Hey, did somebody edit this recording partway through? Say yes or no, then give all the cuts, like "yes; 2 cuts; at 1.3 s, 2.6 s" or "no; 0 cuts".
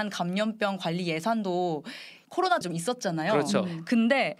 yes; 2 cuts; at 2.2 s, 2.6 s